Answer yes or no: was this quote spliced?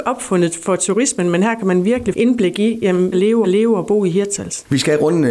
yes